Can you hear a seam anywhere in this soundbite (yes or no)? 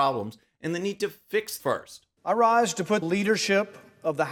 yes